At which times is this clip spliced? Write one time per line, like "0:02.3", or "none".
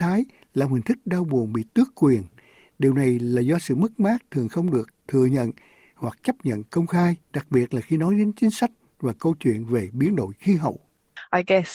0:07.2